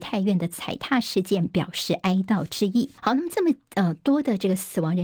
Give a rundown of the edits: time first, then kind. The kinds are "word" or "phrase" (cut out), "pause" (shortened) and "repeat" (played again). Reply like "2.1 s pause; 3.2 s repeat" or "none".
3.0 s pause